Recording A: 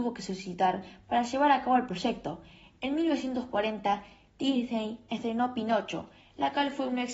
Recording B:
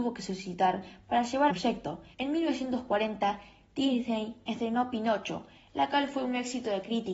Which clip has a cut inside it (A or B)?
B